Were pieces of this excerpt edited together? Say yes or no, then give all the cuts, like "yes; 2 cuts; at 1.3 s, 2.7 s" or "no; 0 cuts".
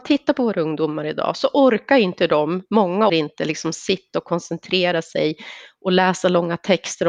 yes; 1 cut; at 3.1 s